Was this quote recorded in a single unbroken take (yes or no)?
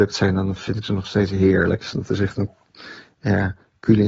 yes